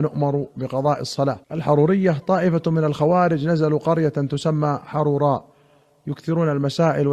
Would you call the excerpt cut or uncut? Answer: cut